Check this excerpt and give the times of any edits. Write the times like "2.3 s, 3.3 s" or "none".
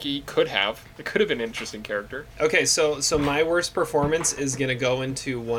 2.3 s

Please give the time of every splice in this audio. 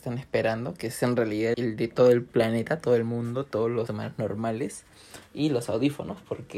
1.5 s, 3.9 s

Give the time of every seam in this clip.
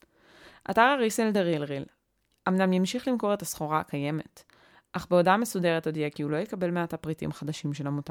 none

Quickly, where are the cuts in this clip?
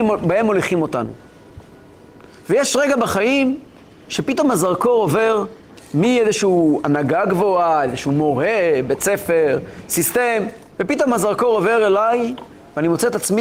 10.7 s

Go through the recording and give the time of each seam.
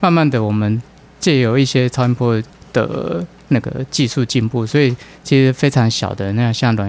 none

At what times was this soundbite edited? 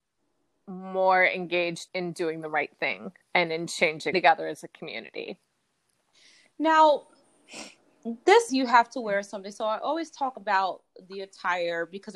1.9 s, 3.2 s, 4.1 s, 8.5 s

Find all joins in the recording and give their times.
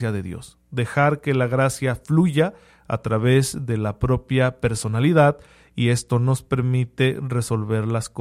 none

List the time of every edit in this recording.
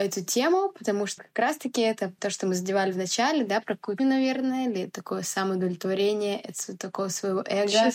1.2 s, 2.2 s, 4.0 s

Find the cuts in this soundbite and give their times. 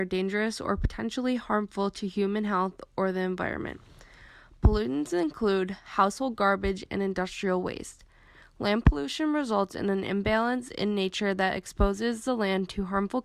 none

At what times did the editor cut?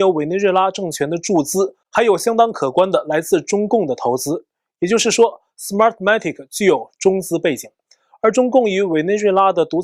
none

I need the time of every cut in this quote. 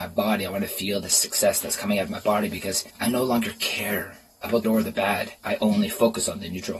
2.9 s, 4.6 s, 5.4 s

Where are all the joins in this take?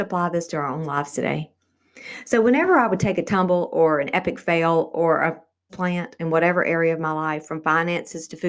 5.7 s

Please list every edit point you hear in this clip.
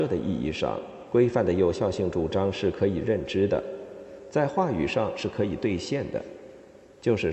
none

